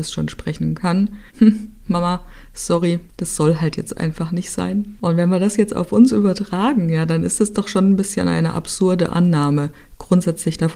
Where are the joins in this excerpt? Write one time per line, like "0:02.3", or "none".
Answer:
0:01.3
0:03.1

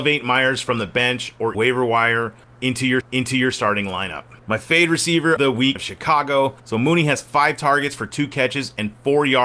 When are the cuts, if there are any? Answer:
0:01.5
0:03.0
0:04.4
0:05.4
0:05.8
0:06.6

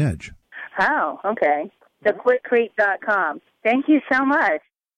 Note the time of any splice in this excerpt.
0:01.9

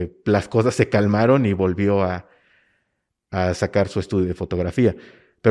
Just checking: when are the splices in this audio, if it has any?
none

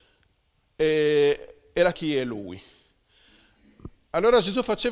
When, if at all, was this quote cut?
0:01.9

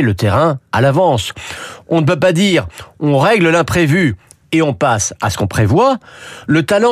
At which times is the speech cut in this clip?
none

